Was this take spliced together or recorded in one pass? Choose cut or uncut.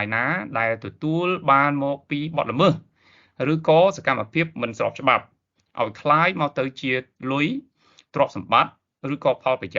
uncut